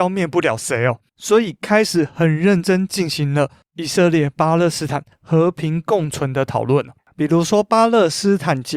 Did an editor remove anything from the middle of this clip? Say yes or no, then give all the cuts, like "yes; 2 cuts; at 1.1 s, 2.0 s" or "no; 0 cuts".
no; 0 cuts